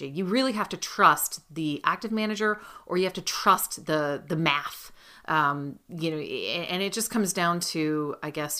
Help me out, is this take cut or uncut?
uncut